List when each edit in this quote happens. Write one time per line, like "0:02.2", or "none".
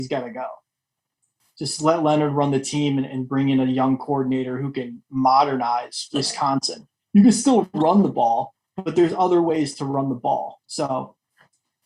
0:10.6